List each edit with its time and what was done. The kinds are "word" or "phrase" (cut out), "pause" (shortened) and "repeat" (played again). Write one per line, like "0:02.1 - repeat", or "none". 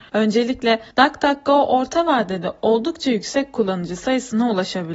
0:00.9 - pause